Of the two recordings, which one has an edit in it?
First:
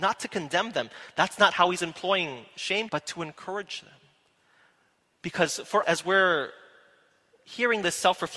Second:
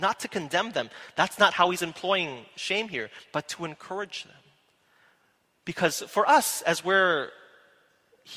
first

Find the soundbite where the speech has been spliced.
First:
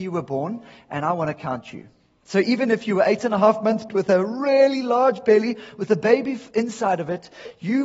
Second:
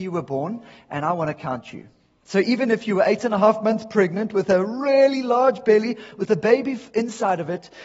first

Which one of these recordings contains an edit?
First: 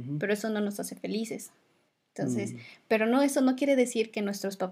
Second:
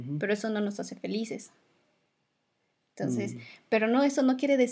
first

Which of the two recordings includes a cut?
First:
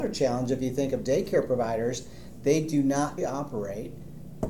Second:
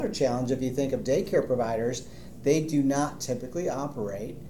first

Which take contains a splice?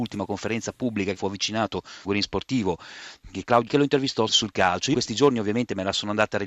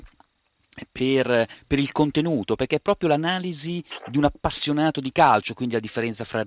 first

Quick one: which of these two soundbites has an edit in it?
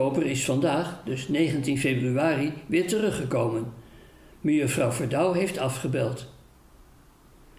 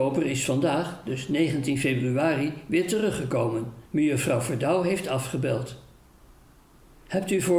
second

